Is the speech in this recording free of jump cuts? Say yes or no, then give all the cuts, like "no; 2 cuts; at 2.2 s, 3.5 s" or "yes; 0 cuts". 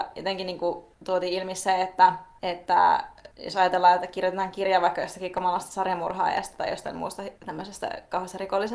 no; 2 cuts; at 3.3 s, 7.4 s